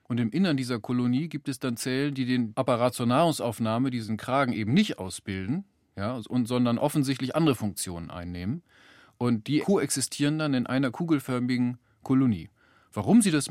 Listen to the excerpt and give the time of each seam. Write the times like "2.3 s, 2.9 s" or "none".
none